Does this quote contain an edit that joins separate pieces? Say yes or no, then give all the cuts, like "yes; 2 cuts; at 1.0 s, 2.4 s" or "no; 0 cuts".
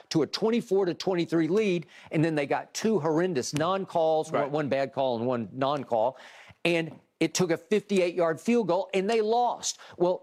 no; 0 cuts